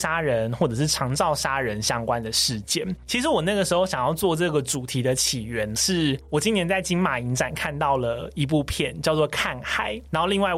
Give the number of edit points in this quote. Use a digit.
1